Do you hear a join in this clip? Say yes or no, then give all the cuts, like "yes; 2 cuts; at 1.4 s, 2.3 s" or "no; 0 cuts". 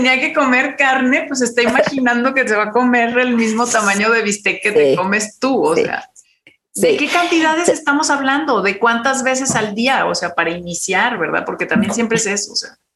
no; 0 cuts